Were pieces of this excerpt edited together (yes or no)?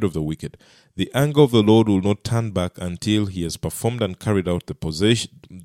no